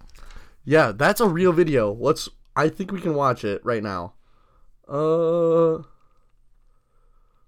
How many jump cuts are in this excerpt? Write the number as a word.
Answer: zero